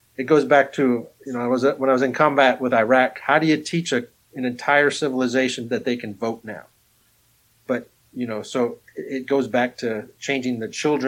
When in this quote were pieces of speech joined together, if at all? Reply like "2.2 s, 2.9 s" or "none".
none